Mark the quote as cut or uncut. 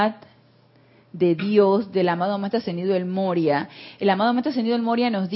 uncut